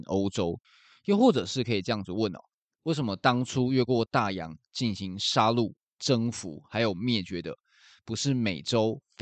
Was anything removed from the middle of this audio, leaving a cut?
no; 0 cuts

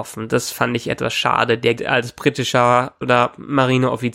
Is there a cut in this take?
yes; 2 cuts; at 1.8 s, 3.0 s

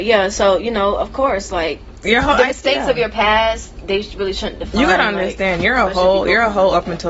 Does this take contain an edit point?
no; 0 cuts

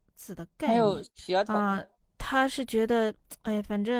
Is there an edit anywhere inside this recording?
yes; 2 cuts; at 1.1 s, 2.0 s

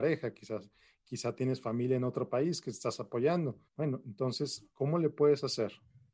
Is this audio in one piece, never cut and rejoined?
no; 2 cuts; at 3.7 s, 4.7 s

